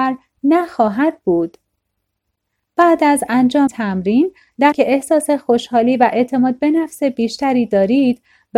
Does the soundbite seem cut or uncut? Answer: cut